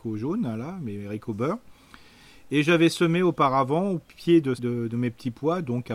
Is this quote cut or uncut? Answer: cut